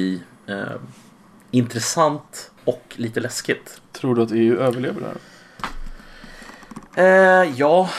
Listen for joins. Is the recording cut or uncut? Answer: cut